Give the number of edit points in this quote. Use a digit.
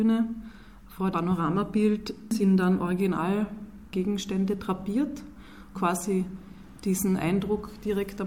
2